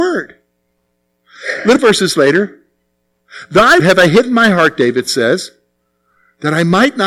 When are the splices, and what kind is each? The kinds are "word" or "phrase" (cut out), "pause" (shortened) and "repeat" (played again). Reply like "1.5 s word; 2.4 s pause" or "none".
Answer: 1.8 s phrase; 3.8 s word